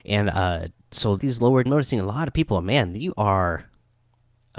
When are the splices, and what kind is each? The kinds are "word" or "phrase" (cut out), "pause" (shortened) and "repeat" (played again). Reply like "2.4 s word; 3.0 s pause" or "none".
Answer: 1.2 s phrase; 1.7 s phrase